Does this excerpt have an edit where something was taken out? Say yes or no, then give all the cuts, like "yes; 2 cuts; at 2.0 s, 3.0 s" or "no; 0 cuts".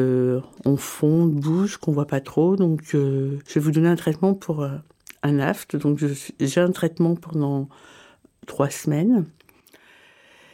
no; 0 cuts